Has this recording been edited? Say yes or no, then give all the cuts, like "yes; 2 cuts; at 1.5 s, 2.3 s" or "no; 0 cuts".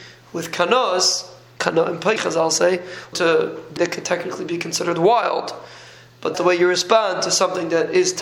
yes; 4 cuts; at 2.2 s, 3.1 s, 3.8 s, 6.3 s